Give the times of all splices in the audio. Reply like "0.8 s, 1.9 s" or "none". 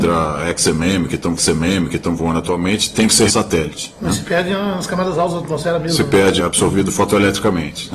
1.4 s, 3.3 s, 6.4 s

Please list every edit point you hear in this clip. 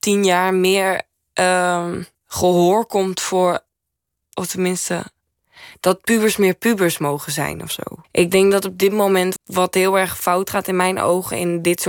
2.1 s, 8.0 s, 9.4 s

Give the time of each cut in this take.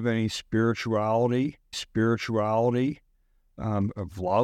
1.7 s

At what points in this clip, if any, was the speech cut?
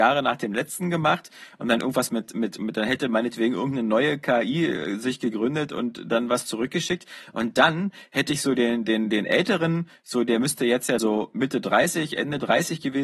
11.0 s

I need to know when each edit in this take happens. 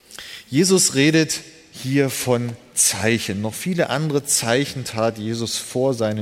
none

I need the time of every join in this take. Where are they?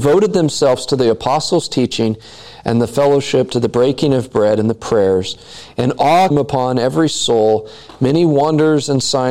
6.3 s

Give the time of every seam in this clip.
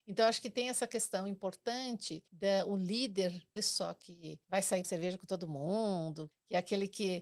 2.3 s, 3.6 s, 4.4 s, 4.8 s, 6.3 s

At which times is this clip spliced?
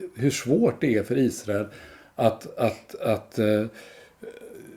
none

